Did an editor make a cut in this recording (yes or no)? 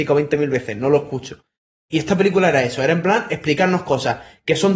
no